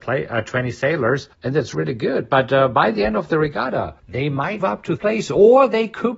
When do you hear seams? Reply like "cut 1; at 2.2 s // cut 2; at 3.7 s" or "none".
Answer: cut 1; at 1.3 s // cut 2; at 1.7 s // cut 3; at 4.0 s // cut 4; at 4.6 s // cut 5; at 5.0 s